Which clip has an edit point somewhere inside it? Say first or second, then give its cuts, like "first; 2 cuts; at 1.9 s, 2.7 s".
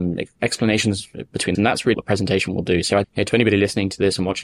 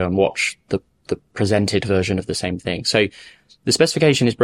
first; 3 cuts; at 1.5 s, 1.9 s, 3.0 s